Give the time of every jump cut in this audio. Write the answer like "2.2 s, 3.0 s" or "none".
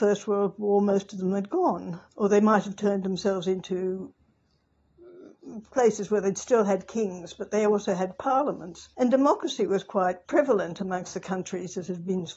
2.1 s, 8.9 s, 10.2 s

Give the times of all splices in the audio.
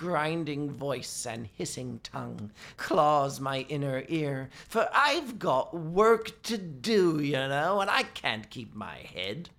2.8 s

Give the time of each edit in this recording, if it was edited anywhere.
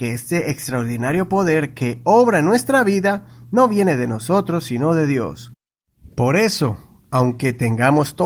none

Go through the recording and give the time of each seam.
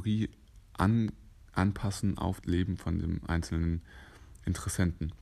2.4 s

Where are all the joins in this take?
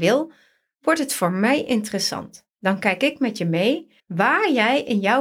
2.5 s, 4.0 s

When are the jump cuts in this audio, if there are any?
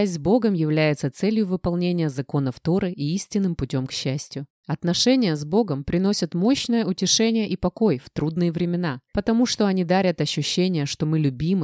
4.5 s, 9.1 s

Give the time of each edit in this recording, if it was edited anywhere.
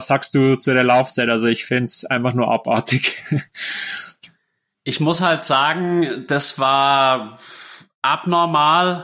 none

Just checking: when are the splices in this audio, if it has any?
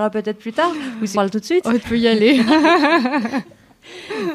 1.1 s, 1.8 s

